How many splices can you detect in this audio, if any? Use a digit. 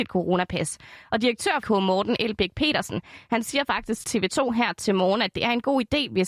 2